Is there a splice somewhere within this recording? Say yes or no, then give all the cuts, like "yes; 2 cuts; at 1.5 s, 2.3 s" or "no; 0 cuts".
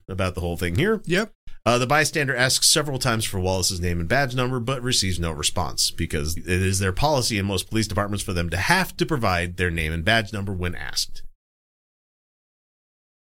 yes; 1 cut; at 6.4 s